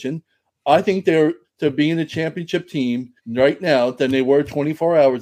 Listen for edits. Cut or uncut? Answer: cut